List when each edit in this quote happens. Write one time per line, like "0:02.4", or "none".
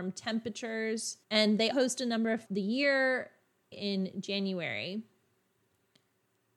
0:01.2
0:01.7
0:02.4
0:03.7